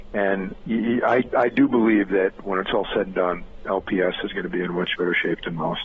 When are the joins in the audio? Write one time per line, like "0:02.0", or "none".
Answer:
none